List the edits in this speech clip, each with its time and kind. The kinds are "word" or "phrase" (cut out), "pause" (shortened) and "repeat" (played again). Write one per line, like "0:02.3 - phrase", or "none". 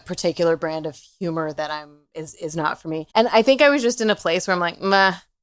0:03.1 - pause